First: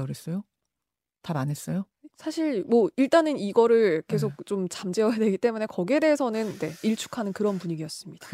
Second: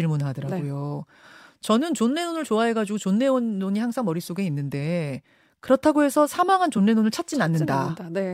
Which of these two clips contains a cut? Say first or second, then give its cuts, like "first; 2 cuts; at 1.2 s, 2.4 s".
first; 1 cut; at 6.8 s